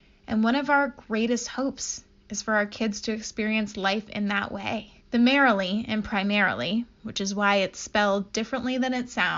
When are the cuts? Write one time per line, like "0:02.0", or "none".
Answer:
0:05.0